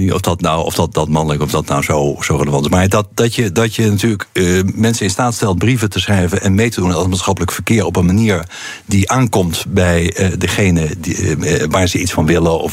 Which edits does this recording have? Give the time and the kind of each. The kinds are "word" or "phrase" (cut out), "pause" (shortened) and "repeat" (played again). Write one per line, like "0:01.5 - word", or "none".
none